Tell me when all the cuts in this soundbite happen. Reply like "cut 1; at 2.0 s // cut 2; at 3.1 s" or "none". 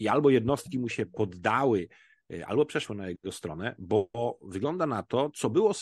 none